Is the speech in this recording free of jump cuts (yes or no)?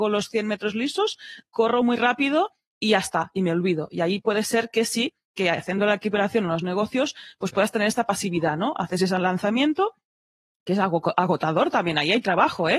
yes